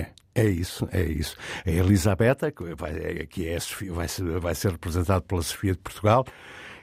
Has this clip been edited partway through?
no; 0 cuts

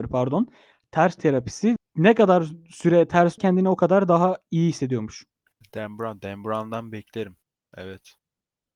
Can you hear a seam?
yes; 3 cuts; at 1.2 s, 1.8 s, 3.4 s

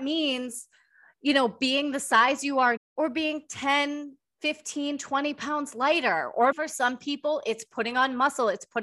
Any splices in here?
yes; 2 cuts; at 2.8 s, 6.5 s

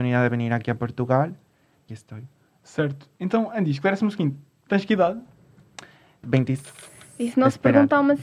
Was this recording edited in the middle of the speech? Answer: yes; 2 cuts; at 1.9 s, 6.2 s

